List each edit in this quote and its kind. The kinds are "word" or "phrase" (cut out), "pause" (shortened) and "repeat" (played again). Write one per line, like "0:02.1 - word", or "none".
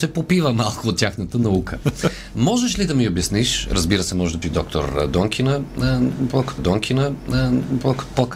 0:04.4 - word
0:06.6 - repeat